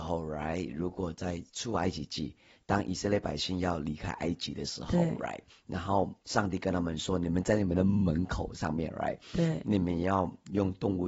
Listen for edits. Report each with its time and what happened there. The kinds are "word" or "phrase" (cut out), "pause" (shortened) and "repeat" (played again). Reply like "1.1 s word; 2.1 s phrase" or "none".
none